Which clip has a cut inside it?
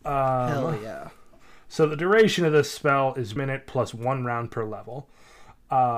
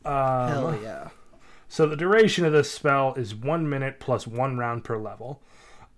first; 1 cut; at 3.4 s

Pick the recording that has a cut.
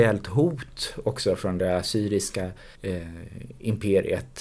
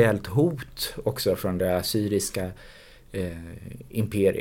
first; 1 cut; at 2.7 s

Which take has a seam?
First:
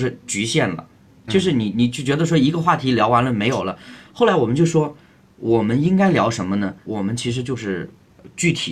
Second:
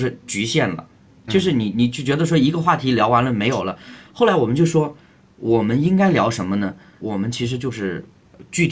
first; 1 cut; at 6.8 s

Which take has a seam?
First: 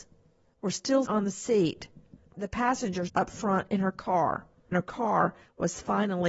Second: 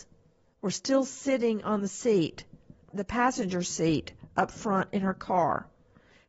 first; 3 cuts; at 1.1 s, 3.1 s, 4.7 s

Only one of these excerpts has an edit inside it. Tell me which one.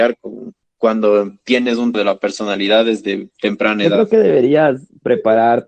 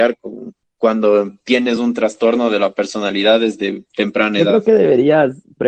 first; 1 cut; at 1.9 s

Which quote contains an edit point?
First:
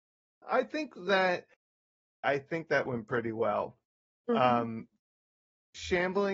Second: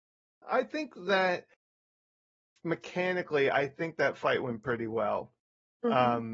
first; 2 cuts; at 2.2 s, 2.9 s

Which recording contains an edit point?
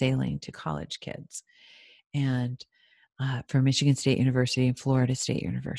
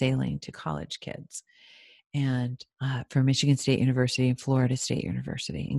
second; 1 cut; at 2.7 s

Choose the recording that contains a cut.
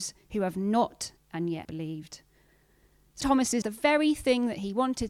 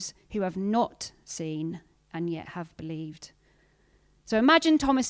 first; 4 cuts; at 1.2 s, 1.6 s, 3.2 s, 3.6 s

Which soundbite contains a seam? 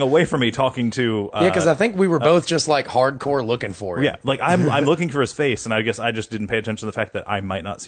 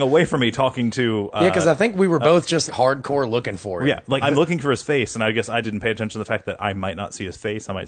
second; 3 cuts; at 2.7 s, 4.2 s, 5.6 s

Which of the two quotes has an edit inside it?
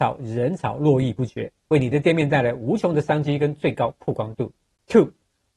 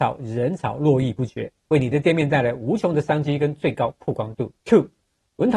second; 1 cut; at 4.6 s

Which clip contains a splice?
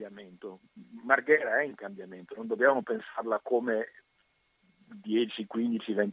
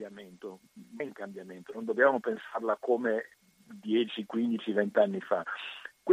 second; 2 cuts; at 1.0 s, 3.3 s

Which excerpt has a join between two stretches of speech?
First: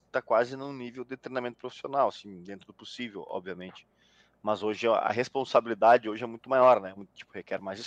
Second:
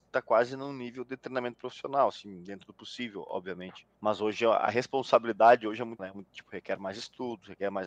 second; 2 cuts; at 3.9 s, 6.0 s

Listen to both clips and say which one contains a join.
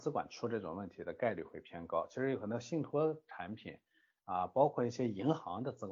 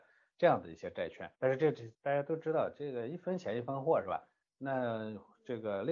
second; 2 cuts; at 1.3 s, 1.9 s

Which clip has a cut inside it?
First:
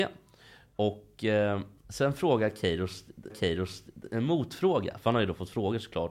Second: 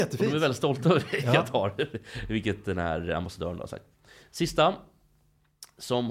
first; 2 cuts; at 1.8 s, 3.3 s

